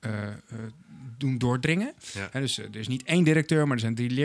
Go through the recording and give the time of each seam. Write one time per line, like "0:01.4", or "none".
none